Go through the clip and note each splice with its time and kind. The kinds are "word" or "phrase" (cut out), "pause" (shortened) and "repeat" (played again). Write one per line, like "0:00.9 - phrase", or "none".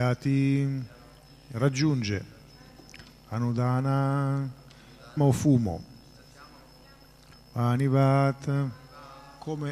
0:05.2 - phrase